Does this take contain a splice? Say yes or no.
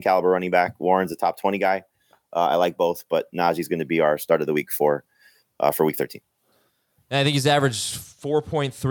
no